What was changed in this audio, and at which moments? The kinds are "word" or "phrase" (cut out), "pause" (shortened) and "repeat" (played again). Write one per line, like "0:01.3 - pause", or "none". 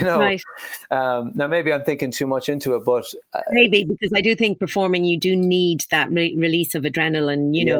none